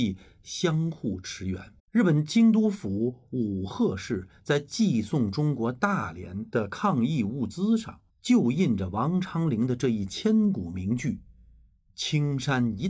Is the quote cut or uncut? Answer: cut